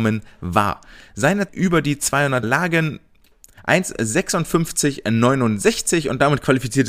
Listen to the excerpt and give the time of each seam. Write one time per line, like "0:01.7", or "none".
0:01.5
0:02.4
0:03.6